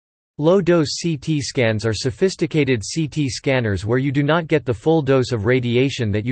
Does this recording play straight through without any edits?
yes; 0 cuts

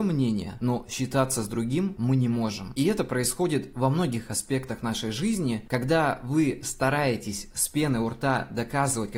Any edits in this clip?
no; 0 cuts

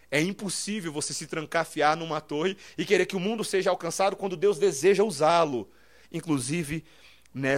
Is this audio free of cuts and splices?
yes; 0 cuts

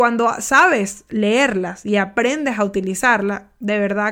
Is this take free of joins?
yes; 0 cuts

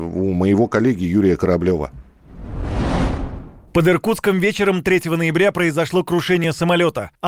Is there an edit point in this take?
no; 0 cuts

